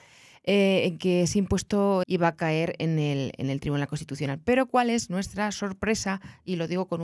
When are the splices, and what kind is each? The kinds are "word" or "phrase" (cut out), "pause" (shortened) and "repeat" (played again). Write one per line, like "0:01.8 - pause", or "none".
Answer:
0:02.0 - word

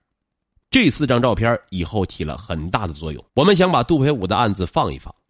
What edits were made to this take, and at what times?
0:03.3 - pause

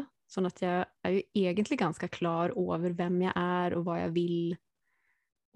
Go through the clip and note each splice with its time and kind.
none

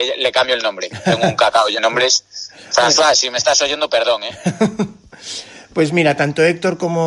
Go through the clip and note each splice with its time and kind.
0:01.8 - word

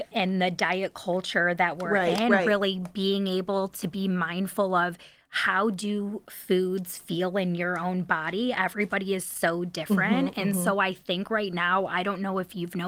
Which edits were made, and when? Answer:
none

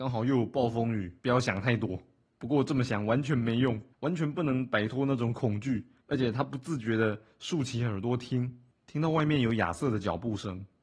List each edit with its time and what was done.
0:01.2 - pause
0:02.3 - pause
0:03.9 - pause
0:06.0 - pause

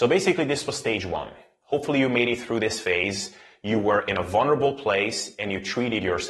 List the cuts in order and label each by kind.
none

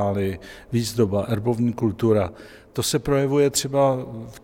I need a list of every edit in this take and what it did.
none

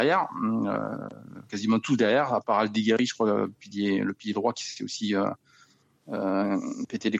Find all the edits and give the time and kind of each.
none

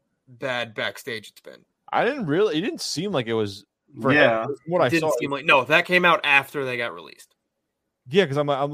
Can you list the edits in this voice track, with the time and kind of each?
none

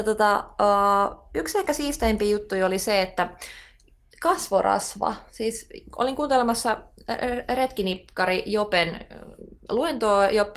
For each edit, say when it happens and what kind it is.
none

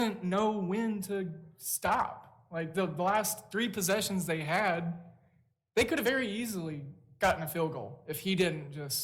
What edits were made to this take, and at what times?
none

